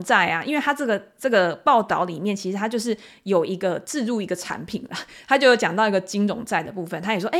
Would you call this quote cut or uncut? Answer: cut